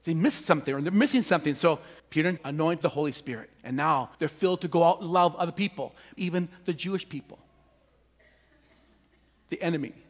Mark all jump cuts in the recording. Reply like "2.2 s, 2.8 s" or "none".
2.0 s, 2.4 s, 2.8 s, 3.6 s, 4.1 s, 6.2 s